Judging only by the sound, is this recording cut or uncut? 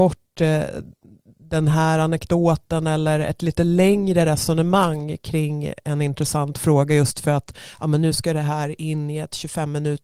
uncut